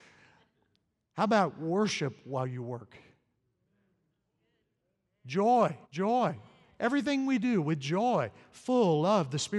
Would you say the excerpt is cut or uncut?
cut